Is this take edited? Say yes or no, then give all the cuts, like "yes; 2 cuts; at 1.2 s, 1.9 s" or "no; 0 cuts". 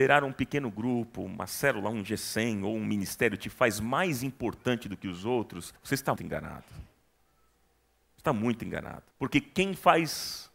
yes; 3 cuts; at 5.8 s, 6.2 s, 9.1 s